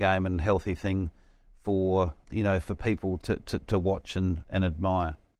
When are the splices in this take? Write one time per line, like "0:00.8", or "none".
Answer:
0:02.2
0:03.2